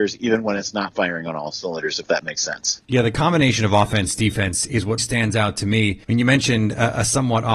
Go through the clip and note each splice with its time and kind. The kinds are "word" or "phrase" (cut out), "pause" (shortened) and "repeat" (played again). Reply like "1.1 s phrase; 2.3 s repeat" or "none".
2.8 s pause; 5.0 s word; 6.0 s pause